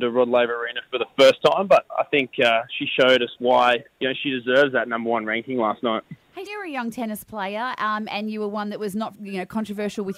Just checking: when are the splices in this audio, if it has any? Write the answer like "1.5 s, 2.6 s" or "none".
3.9 s, 6.5 s, 9.1 s